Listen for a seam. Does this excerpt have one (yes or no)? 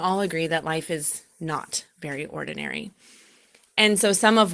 no